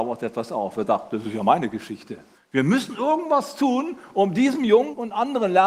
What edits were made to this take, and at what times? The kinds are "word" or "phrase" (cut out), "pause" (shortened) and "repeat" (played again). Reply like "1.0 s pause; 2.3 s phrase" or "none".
2.3 s pause